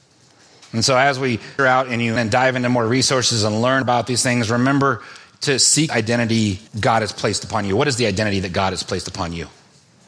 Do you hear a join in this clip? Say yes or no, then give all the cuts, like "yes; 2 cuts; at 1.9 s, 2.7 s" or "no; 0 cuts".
yes; 5 cuts; at 1.6 s, 2.2 s, 3.8 s, 5.9 s, 6.7 s